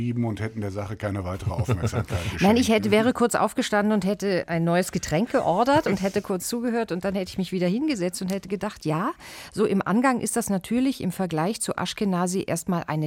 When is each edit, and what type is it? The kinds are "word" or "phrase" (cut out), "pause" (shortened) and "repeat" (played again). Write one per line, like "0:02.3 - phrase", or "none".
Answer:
0:04.4 - word